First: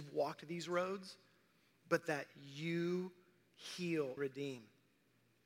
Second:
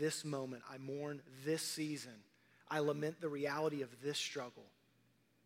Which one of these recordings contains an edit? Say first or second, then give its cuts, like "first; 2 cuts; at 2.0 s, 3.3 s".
first; 1 cut; at 4.2 s